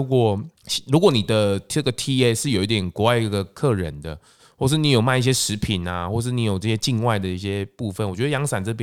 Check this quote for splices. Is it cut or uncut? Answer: uncut